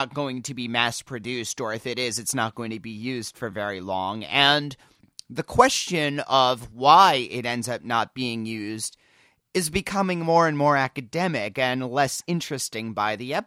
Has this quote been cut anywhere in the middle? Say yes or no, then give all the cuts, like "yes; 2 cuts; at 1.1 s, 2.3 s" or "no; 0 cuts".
no; 0 cuts